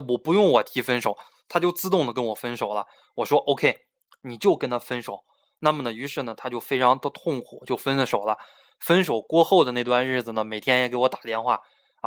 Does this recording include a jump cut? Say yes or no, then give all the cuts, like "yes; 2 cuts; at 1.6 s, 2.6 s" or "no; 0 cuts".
no; 0 cuts